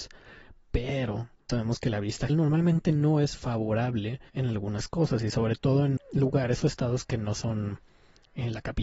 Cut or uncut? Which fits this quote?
cut